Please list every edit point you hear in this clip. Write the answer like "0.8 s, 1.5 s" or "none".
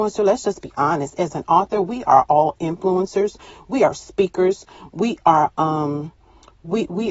none

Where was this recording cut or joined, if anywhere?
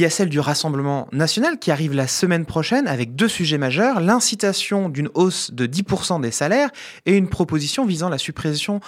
none

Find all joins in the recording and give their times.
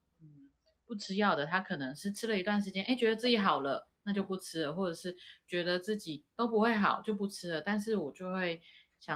none

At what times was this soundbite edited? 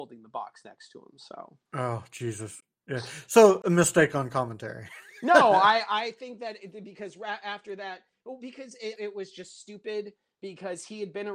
9.0 s

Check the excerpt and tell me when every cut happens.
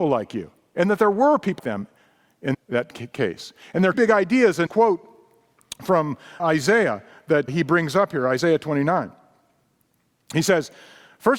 1.6 s, 2.5 s, 3.9 s, 4.7 s, 6.4 s, 7.5 s

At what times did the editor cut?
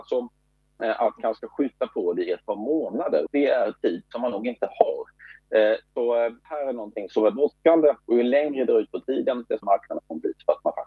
1.2 s, 3.3 s, 6.4 s, 7.1 s, 9.6 s

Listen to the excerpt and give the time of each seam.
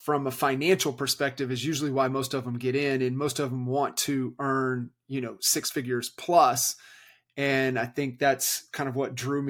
none

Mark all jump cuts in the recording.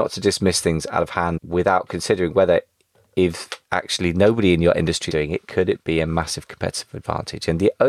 3.6 s, 5.1 s

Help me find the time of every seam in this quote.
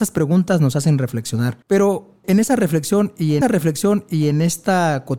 1.6 s, 3.4 s

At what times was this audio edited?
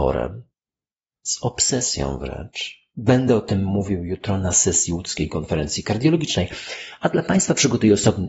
none

